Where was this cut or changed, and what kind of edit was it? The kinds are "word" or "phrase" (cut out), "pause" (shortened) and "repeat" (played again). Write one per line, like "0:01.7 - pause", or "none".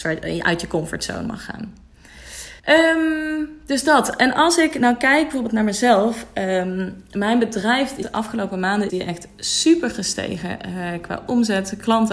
0:02.6 - pause
0:08.0 - word
0:08.9 - word